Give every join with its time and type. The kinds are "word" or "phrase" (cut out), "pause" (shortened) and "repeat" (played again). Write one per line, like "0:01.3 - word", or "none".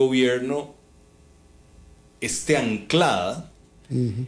none